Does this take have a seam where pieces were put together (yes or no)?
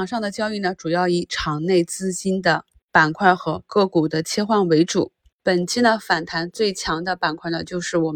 no